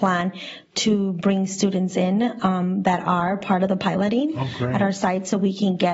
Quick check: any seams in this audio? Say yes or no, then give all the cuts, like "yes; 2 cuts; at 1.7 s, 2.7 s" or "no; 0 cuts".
no; 0 cuts